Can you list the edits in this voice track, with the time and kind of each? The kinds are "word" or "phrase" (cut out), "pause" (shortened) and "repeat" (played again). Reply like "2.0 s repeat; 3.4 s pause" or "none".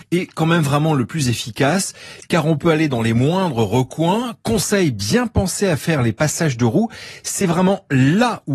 none